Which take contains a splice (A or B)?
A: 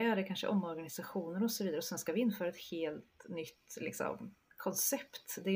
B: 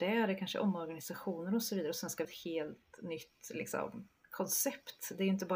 B